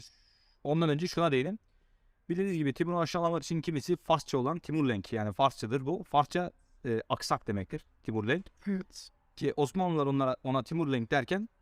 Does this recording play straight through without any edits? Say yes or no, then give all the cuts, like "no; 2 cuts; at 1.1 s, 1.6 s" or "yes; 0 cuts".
yes; 0 cuts